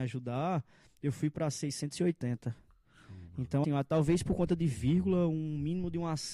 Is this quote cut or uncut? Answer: cut